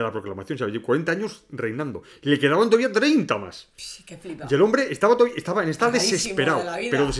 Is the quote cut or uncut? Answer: cut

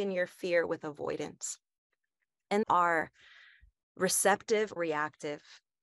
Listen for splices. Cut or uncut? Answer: cut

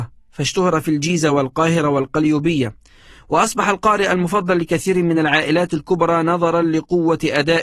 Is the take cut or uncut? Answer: uncut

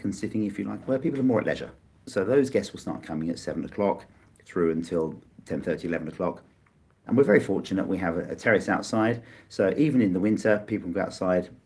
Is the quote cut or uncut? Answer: uncut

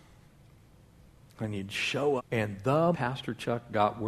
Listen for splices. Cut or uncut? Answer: cut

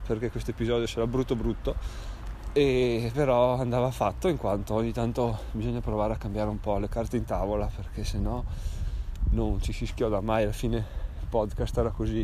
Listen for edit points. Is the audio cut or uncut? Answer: uncut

